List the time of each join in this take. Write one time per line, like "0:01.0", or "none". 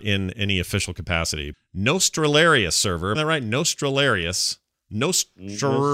0:01.5
0:03.2

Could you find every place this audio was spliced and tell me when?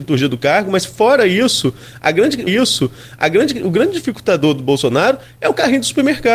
0:02.5

